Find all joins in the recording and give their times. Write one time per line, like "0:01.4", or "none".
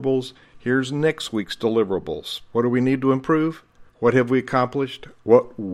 0:03.9